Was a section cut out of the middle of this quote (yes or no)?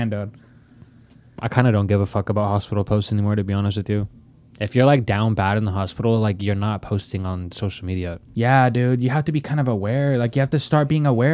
no